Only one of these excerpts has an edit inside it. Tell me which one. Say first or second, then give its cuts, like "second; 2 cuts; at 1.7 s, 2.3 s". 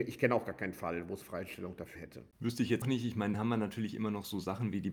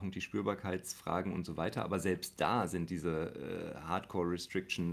first; 5 cuts; at 1.2 s, 2.0 s, 2.3 s, 2.8 s, 3.3 s